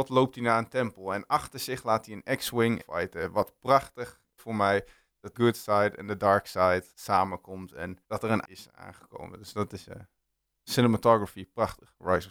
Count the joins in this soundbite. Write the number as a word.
six